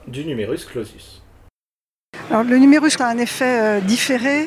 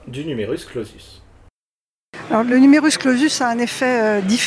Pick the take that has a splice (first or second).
first